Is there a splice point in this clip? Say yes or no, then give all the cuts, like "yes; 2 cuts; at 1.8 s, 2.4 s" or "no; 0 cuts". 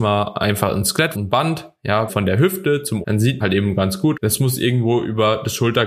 yes; 5 cuts; at 1.1 s, 2.1 s, 3.0 s, 3.4 s, 4.1 s